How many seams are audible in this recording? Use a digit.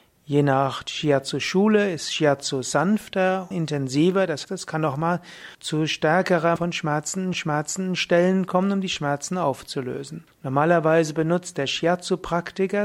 6